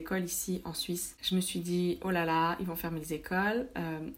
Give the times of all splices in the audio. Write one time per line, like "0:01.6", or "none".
none